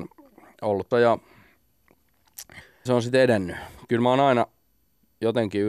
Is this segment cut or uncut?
cut